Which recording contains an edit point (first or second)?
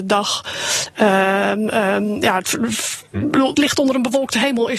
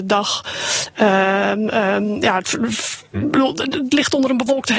first